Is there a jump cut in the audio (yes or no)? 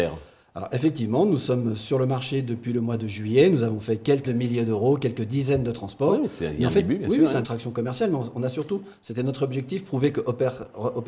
yes